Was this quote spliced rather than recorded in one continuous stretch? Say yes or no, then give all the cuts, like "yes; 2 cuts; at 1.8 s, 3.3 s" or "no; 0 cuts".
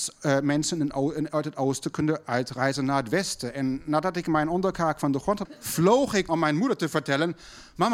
yes; 2 cuts; at 5.4 s, 6.3 s